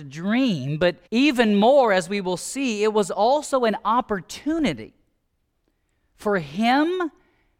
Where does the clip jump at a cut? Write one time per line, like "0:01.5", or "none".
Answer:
0:01.1